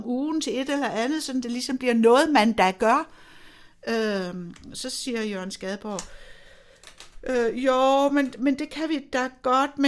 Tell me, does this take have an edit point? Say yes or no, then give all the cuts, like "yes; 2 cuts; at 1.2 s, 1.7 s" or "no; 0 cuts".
no; 0 cuts